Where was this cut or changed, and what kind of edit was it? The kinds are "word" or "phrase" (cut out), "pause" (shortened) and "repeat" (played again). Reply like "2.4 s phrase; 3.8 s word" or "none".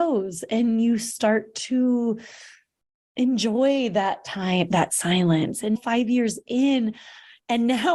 5.7 s word